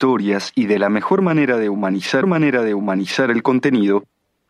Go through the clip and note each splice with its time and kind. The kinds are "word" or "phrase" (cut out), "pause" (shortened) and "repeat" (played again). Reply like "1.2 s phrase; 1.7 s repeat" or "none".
2.2 s repeat

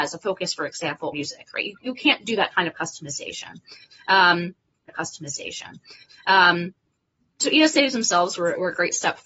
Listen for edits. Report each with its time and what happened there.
1.1 s word; 4.9 s repeat

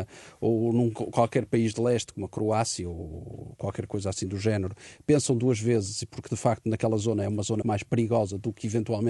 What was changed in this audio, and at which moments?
7.6 s word

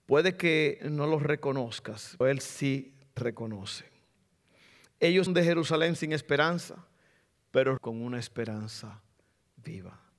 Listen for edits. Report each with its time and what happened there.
2.2 s word; 3.2 s word; 5.3 s word; 7.8 s word

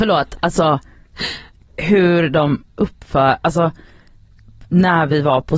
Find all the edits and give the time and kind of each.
none

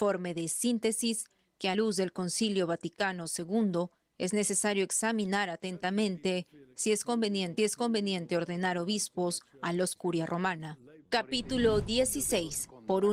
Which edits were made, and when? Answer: 1.7 s word; 7.6 s repeat; 10.0 s phrase; 11.0 s pause

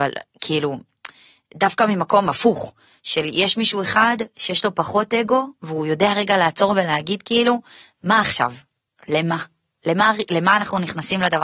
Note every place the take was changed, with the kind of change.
none

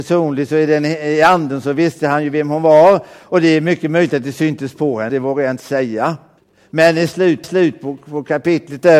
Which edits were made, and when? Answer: 5.1 s word; 6.4 s pause; 7.4 s repeat

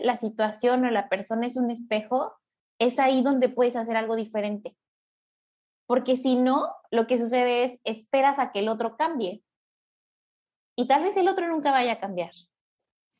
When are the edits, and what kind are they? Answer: none

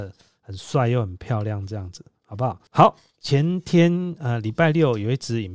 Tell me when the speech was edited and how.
2.7 s pause

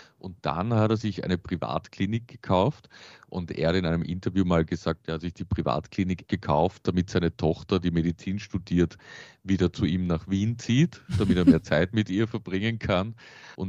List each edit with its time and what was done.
6.3 s word

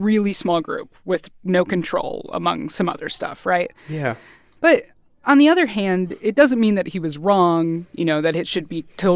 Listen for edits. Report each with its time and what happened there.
none

